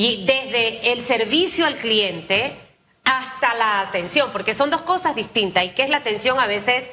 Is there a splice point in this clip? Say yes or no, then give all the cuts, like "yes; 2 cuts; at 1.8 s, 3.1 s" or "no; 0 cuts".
no; 0 cuts